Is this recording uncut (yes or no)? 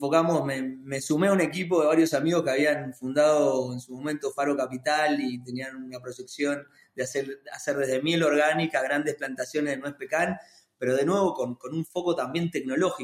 yes